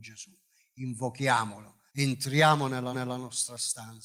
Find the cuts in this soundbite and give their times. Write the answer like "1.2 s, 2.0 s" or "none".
1.9 s, 2.9 s